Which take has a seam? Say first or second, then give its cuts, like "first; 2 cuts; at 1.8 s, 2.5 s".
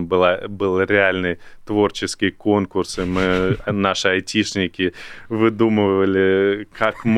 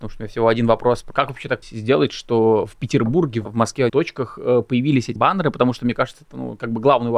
second; 5 cuts; at 1.1 s, 1.6 s, 3.5 s, 3.9 s, 5.2 s